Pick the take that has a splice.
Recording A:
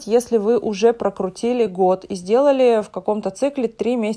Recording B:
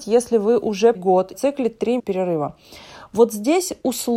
B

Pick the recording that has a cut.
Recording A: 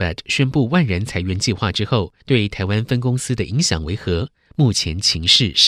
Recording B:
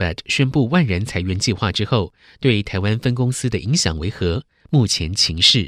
A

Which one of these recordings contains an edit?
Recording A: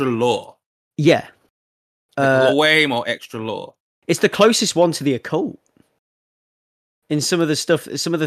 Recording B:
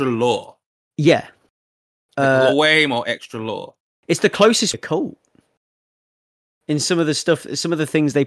B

